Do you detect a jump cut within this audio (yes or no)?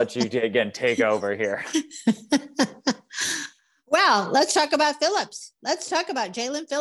no